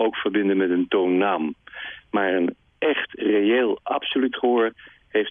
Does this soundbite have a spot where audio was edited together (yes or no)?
no